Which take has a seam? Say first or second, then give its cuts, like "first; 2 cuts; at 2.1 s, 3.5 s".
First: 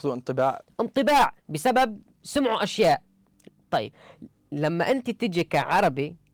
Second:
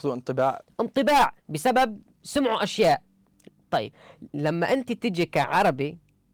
second; 1 cut; at 4.3 s